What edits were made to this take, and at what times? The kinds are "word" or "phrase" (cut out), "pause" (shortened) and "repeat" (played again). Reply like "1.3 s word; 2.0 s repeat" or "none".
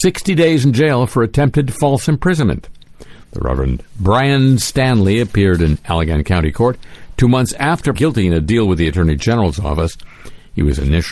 7.9 s word